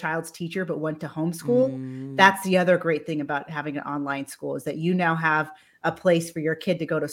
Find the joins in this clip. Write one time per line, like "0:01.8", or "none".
none